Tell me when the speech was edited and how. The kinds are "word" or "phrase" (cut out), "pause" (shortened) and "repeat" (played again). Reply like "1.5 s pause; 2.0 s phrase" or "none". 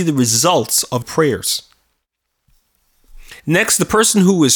1.0 s word; 3.4 s pause